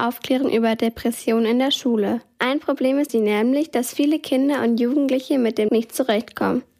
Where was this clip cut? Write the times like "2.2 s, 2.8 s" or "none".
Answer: 3.1 s, 5.7 s